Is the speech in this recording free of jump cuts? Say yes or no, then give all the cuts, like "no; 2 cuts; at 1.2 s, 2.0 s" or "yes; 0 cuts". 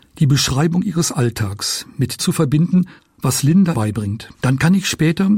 no; 4 cuts; at 2.2 s, 3.0 s, 3.7 s, 4.3 s